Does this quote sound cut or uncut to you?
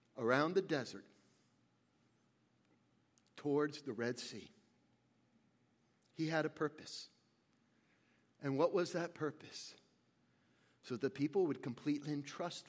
uncut